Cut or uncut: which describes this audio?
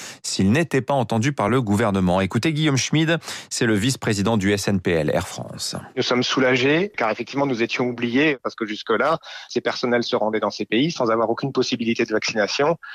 uncut